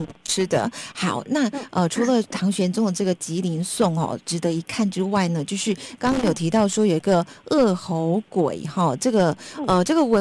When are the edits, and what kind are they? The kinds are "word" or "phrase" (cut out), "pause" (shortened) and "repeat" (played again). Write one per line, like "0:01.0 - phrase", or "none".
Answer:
none